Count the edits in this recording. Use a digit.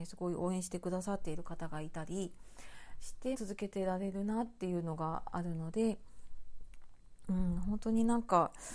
1